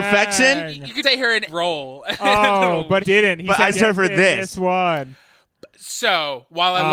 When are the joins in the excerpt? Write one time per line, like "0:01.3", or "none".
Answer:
0:01.0
0:01.5
0:03.0
0:03.7